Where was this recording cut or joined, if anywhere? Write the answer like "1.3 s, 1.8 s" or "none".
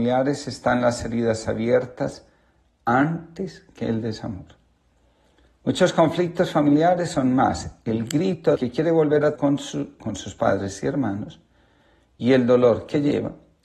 8.5 s, 9.3 s, 10.0 s

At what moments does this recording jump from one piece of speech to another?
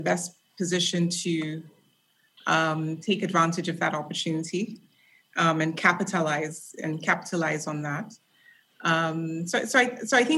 none

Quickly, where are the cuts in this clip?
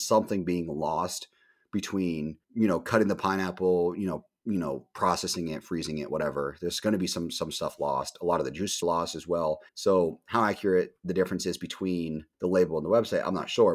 2.4 s, 8.8 s, 9.7 s, 12.3 s

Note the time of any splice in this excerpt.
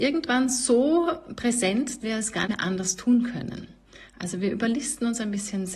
2.0 s, 2.5 s

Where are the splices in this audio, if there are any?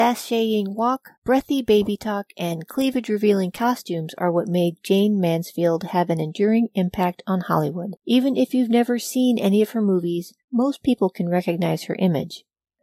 1.2 s, 8.0 s, 10.4 s

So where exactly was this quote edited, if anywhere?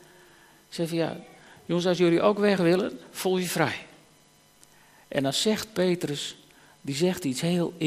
none

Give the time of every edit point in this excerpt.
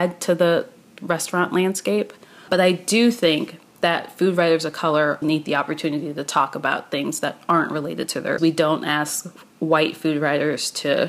2.5 s, 3.6 s, 5.2 s, 8.4 s

